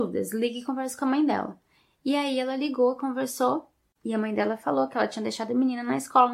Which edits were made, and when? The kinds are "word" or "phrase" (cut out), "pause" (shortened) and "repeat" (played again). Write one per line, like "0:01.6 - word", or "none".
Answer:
none